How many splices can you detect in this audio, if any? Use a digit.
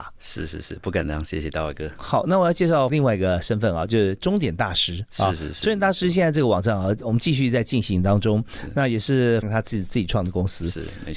2